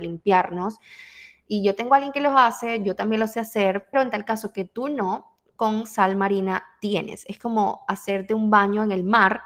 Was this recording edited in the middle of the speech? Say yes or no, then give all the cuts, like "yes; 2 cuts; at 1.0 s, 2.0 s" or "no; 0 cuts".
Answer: yes; 1 cut; at 3.9 s